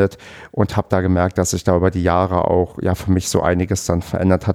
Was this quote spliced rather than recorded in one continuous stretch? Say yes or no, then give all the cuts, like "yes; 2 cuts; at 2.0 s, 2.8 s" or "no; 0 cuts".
no; 0 cuts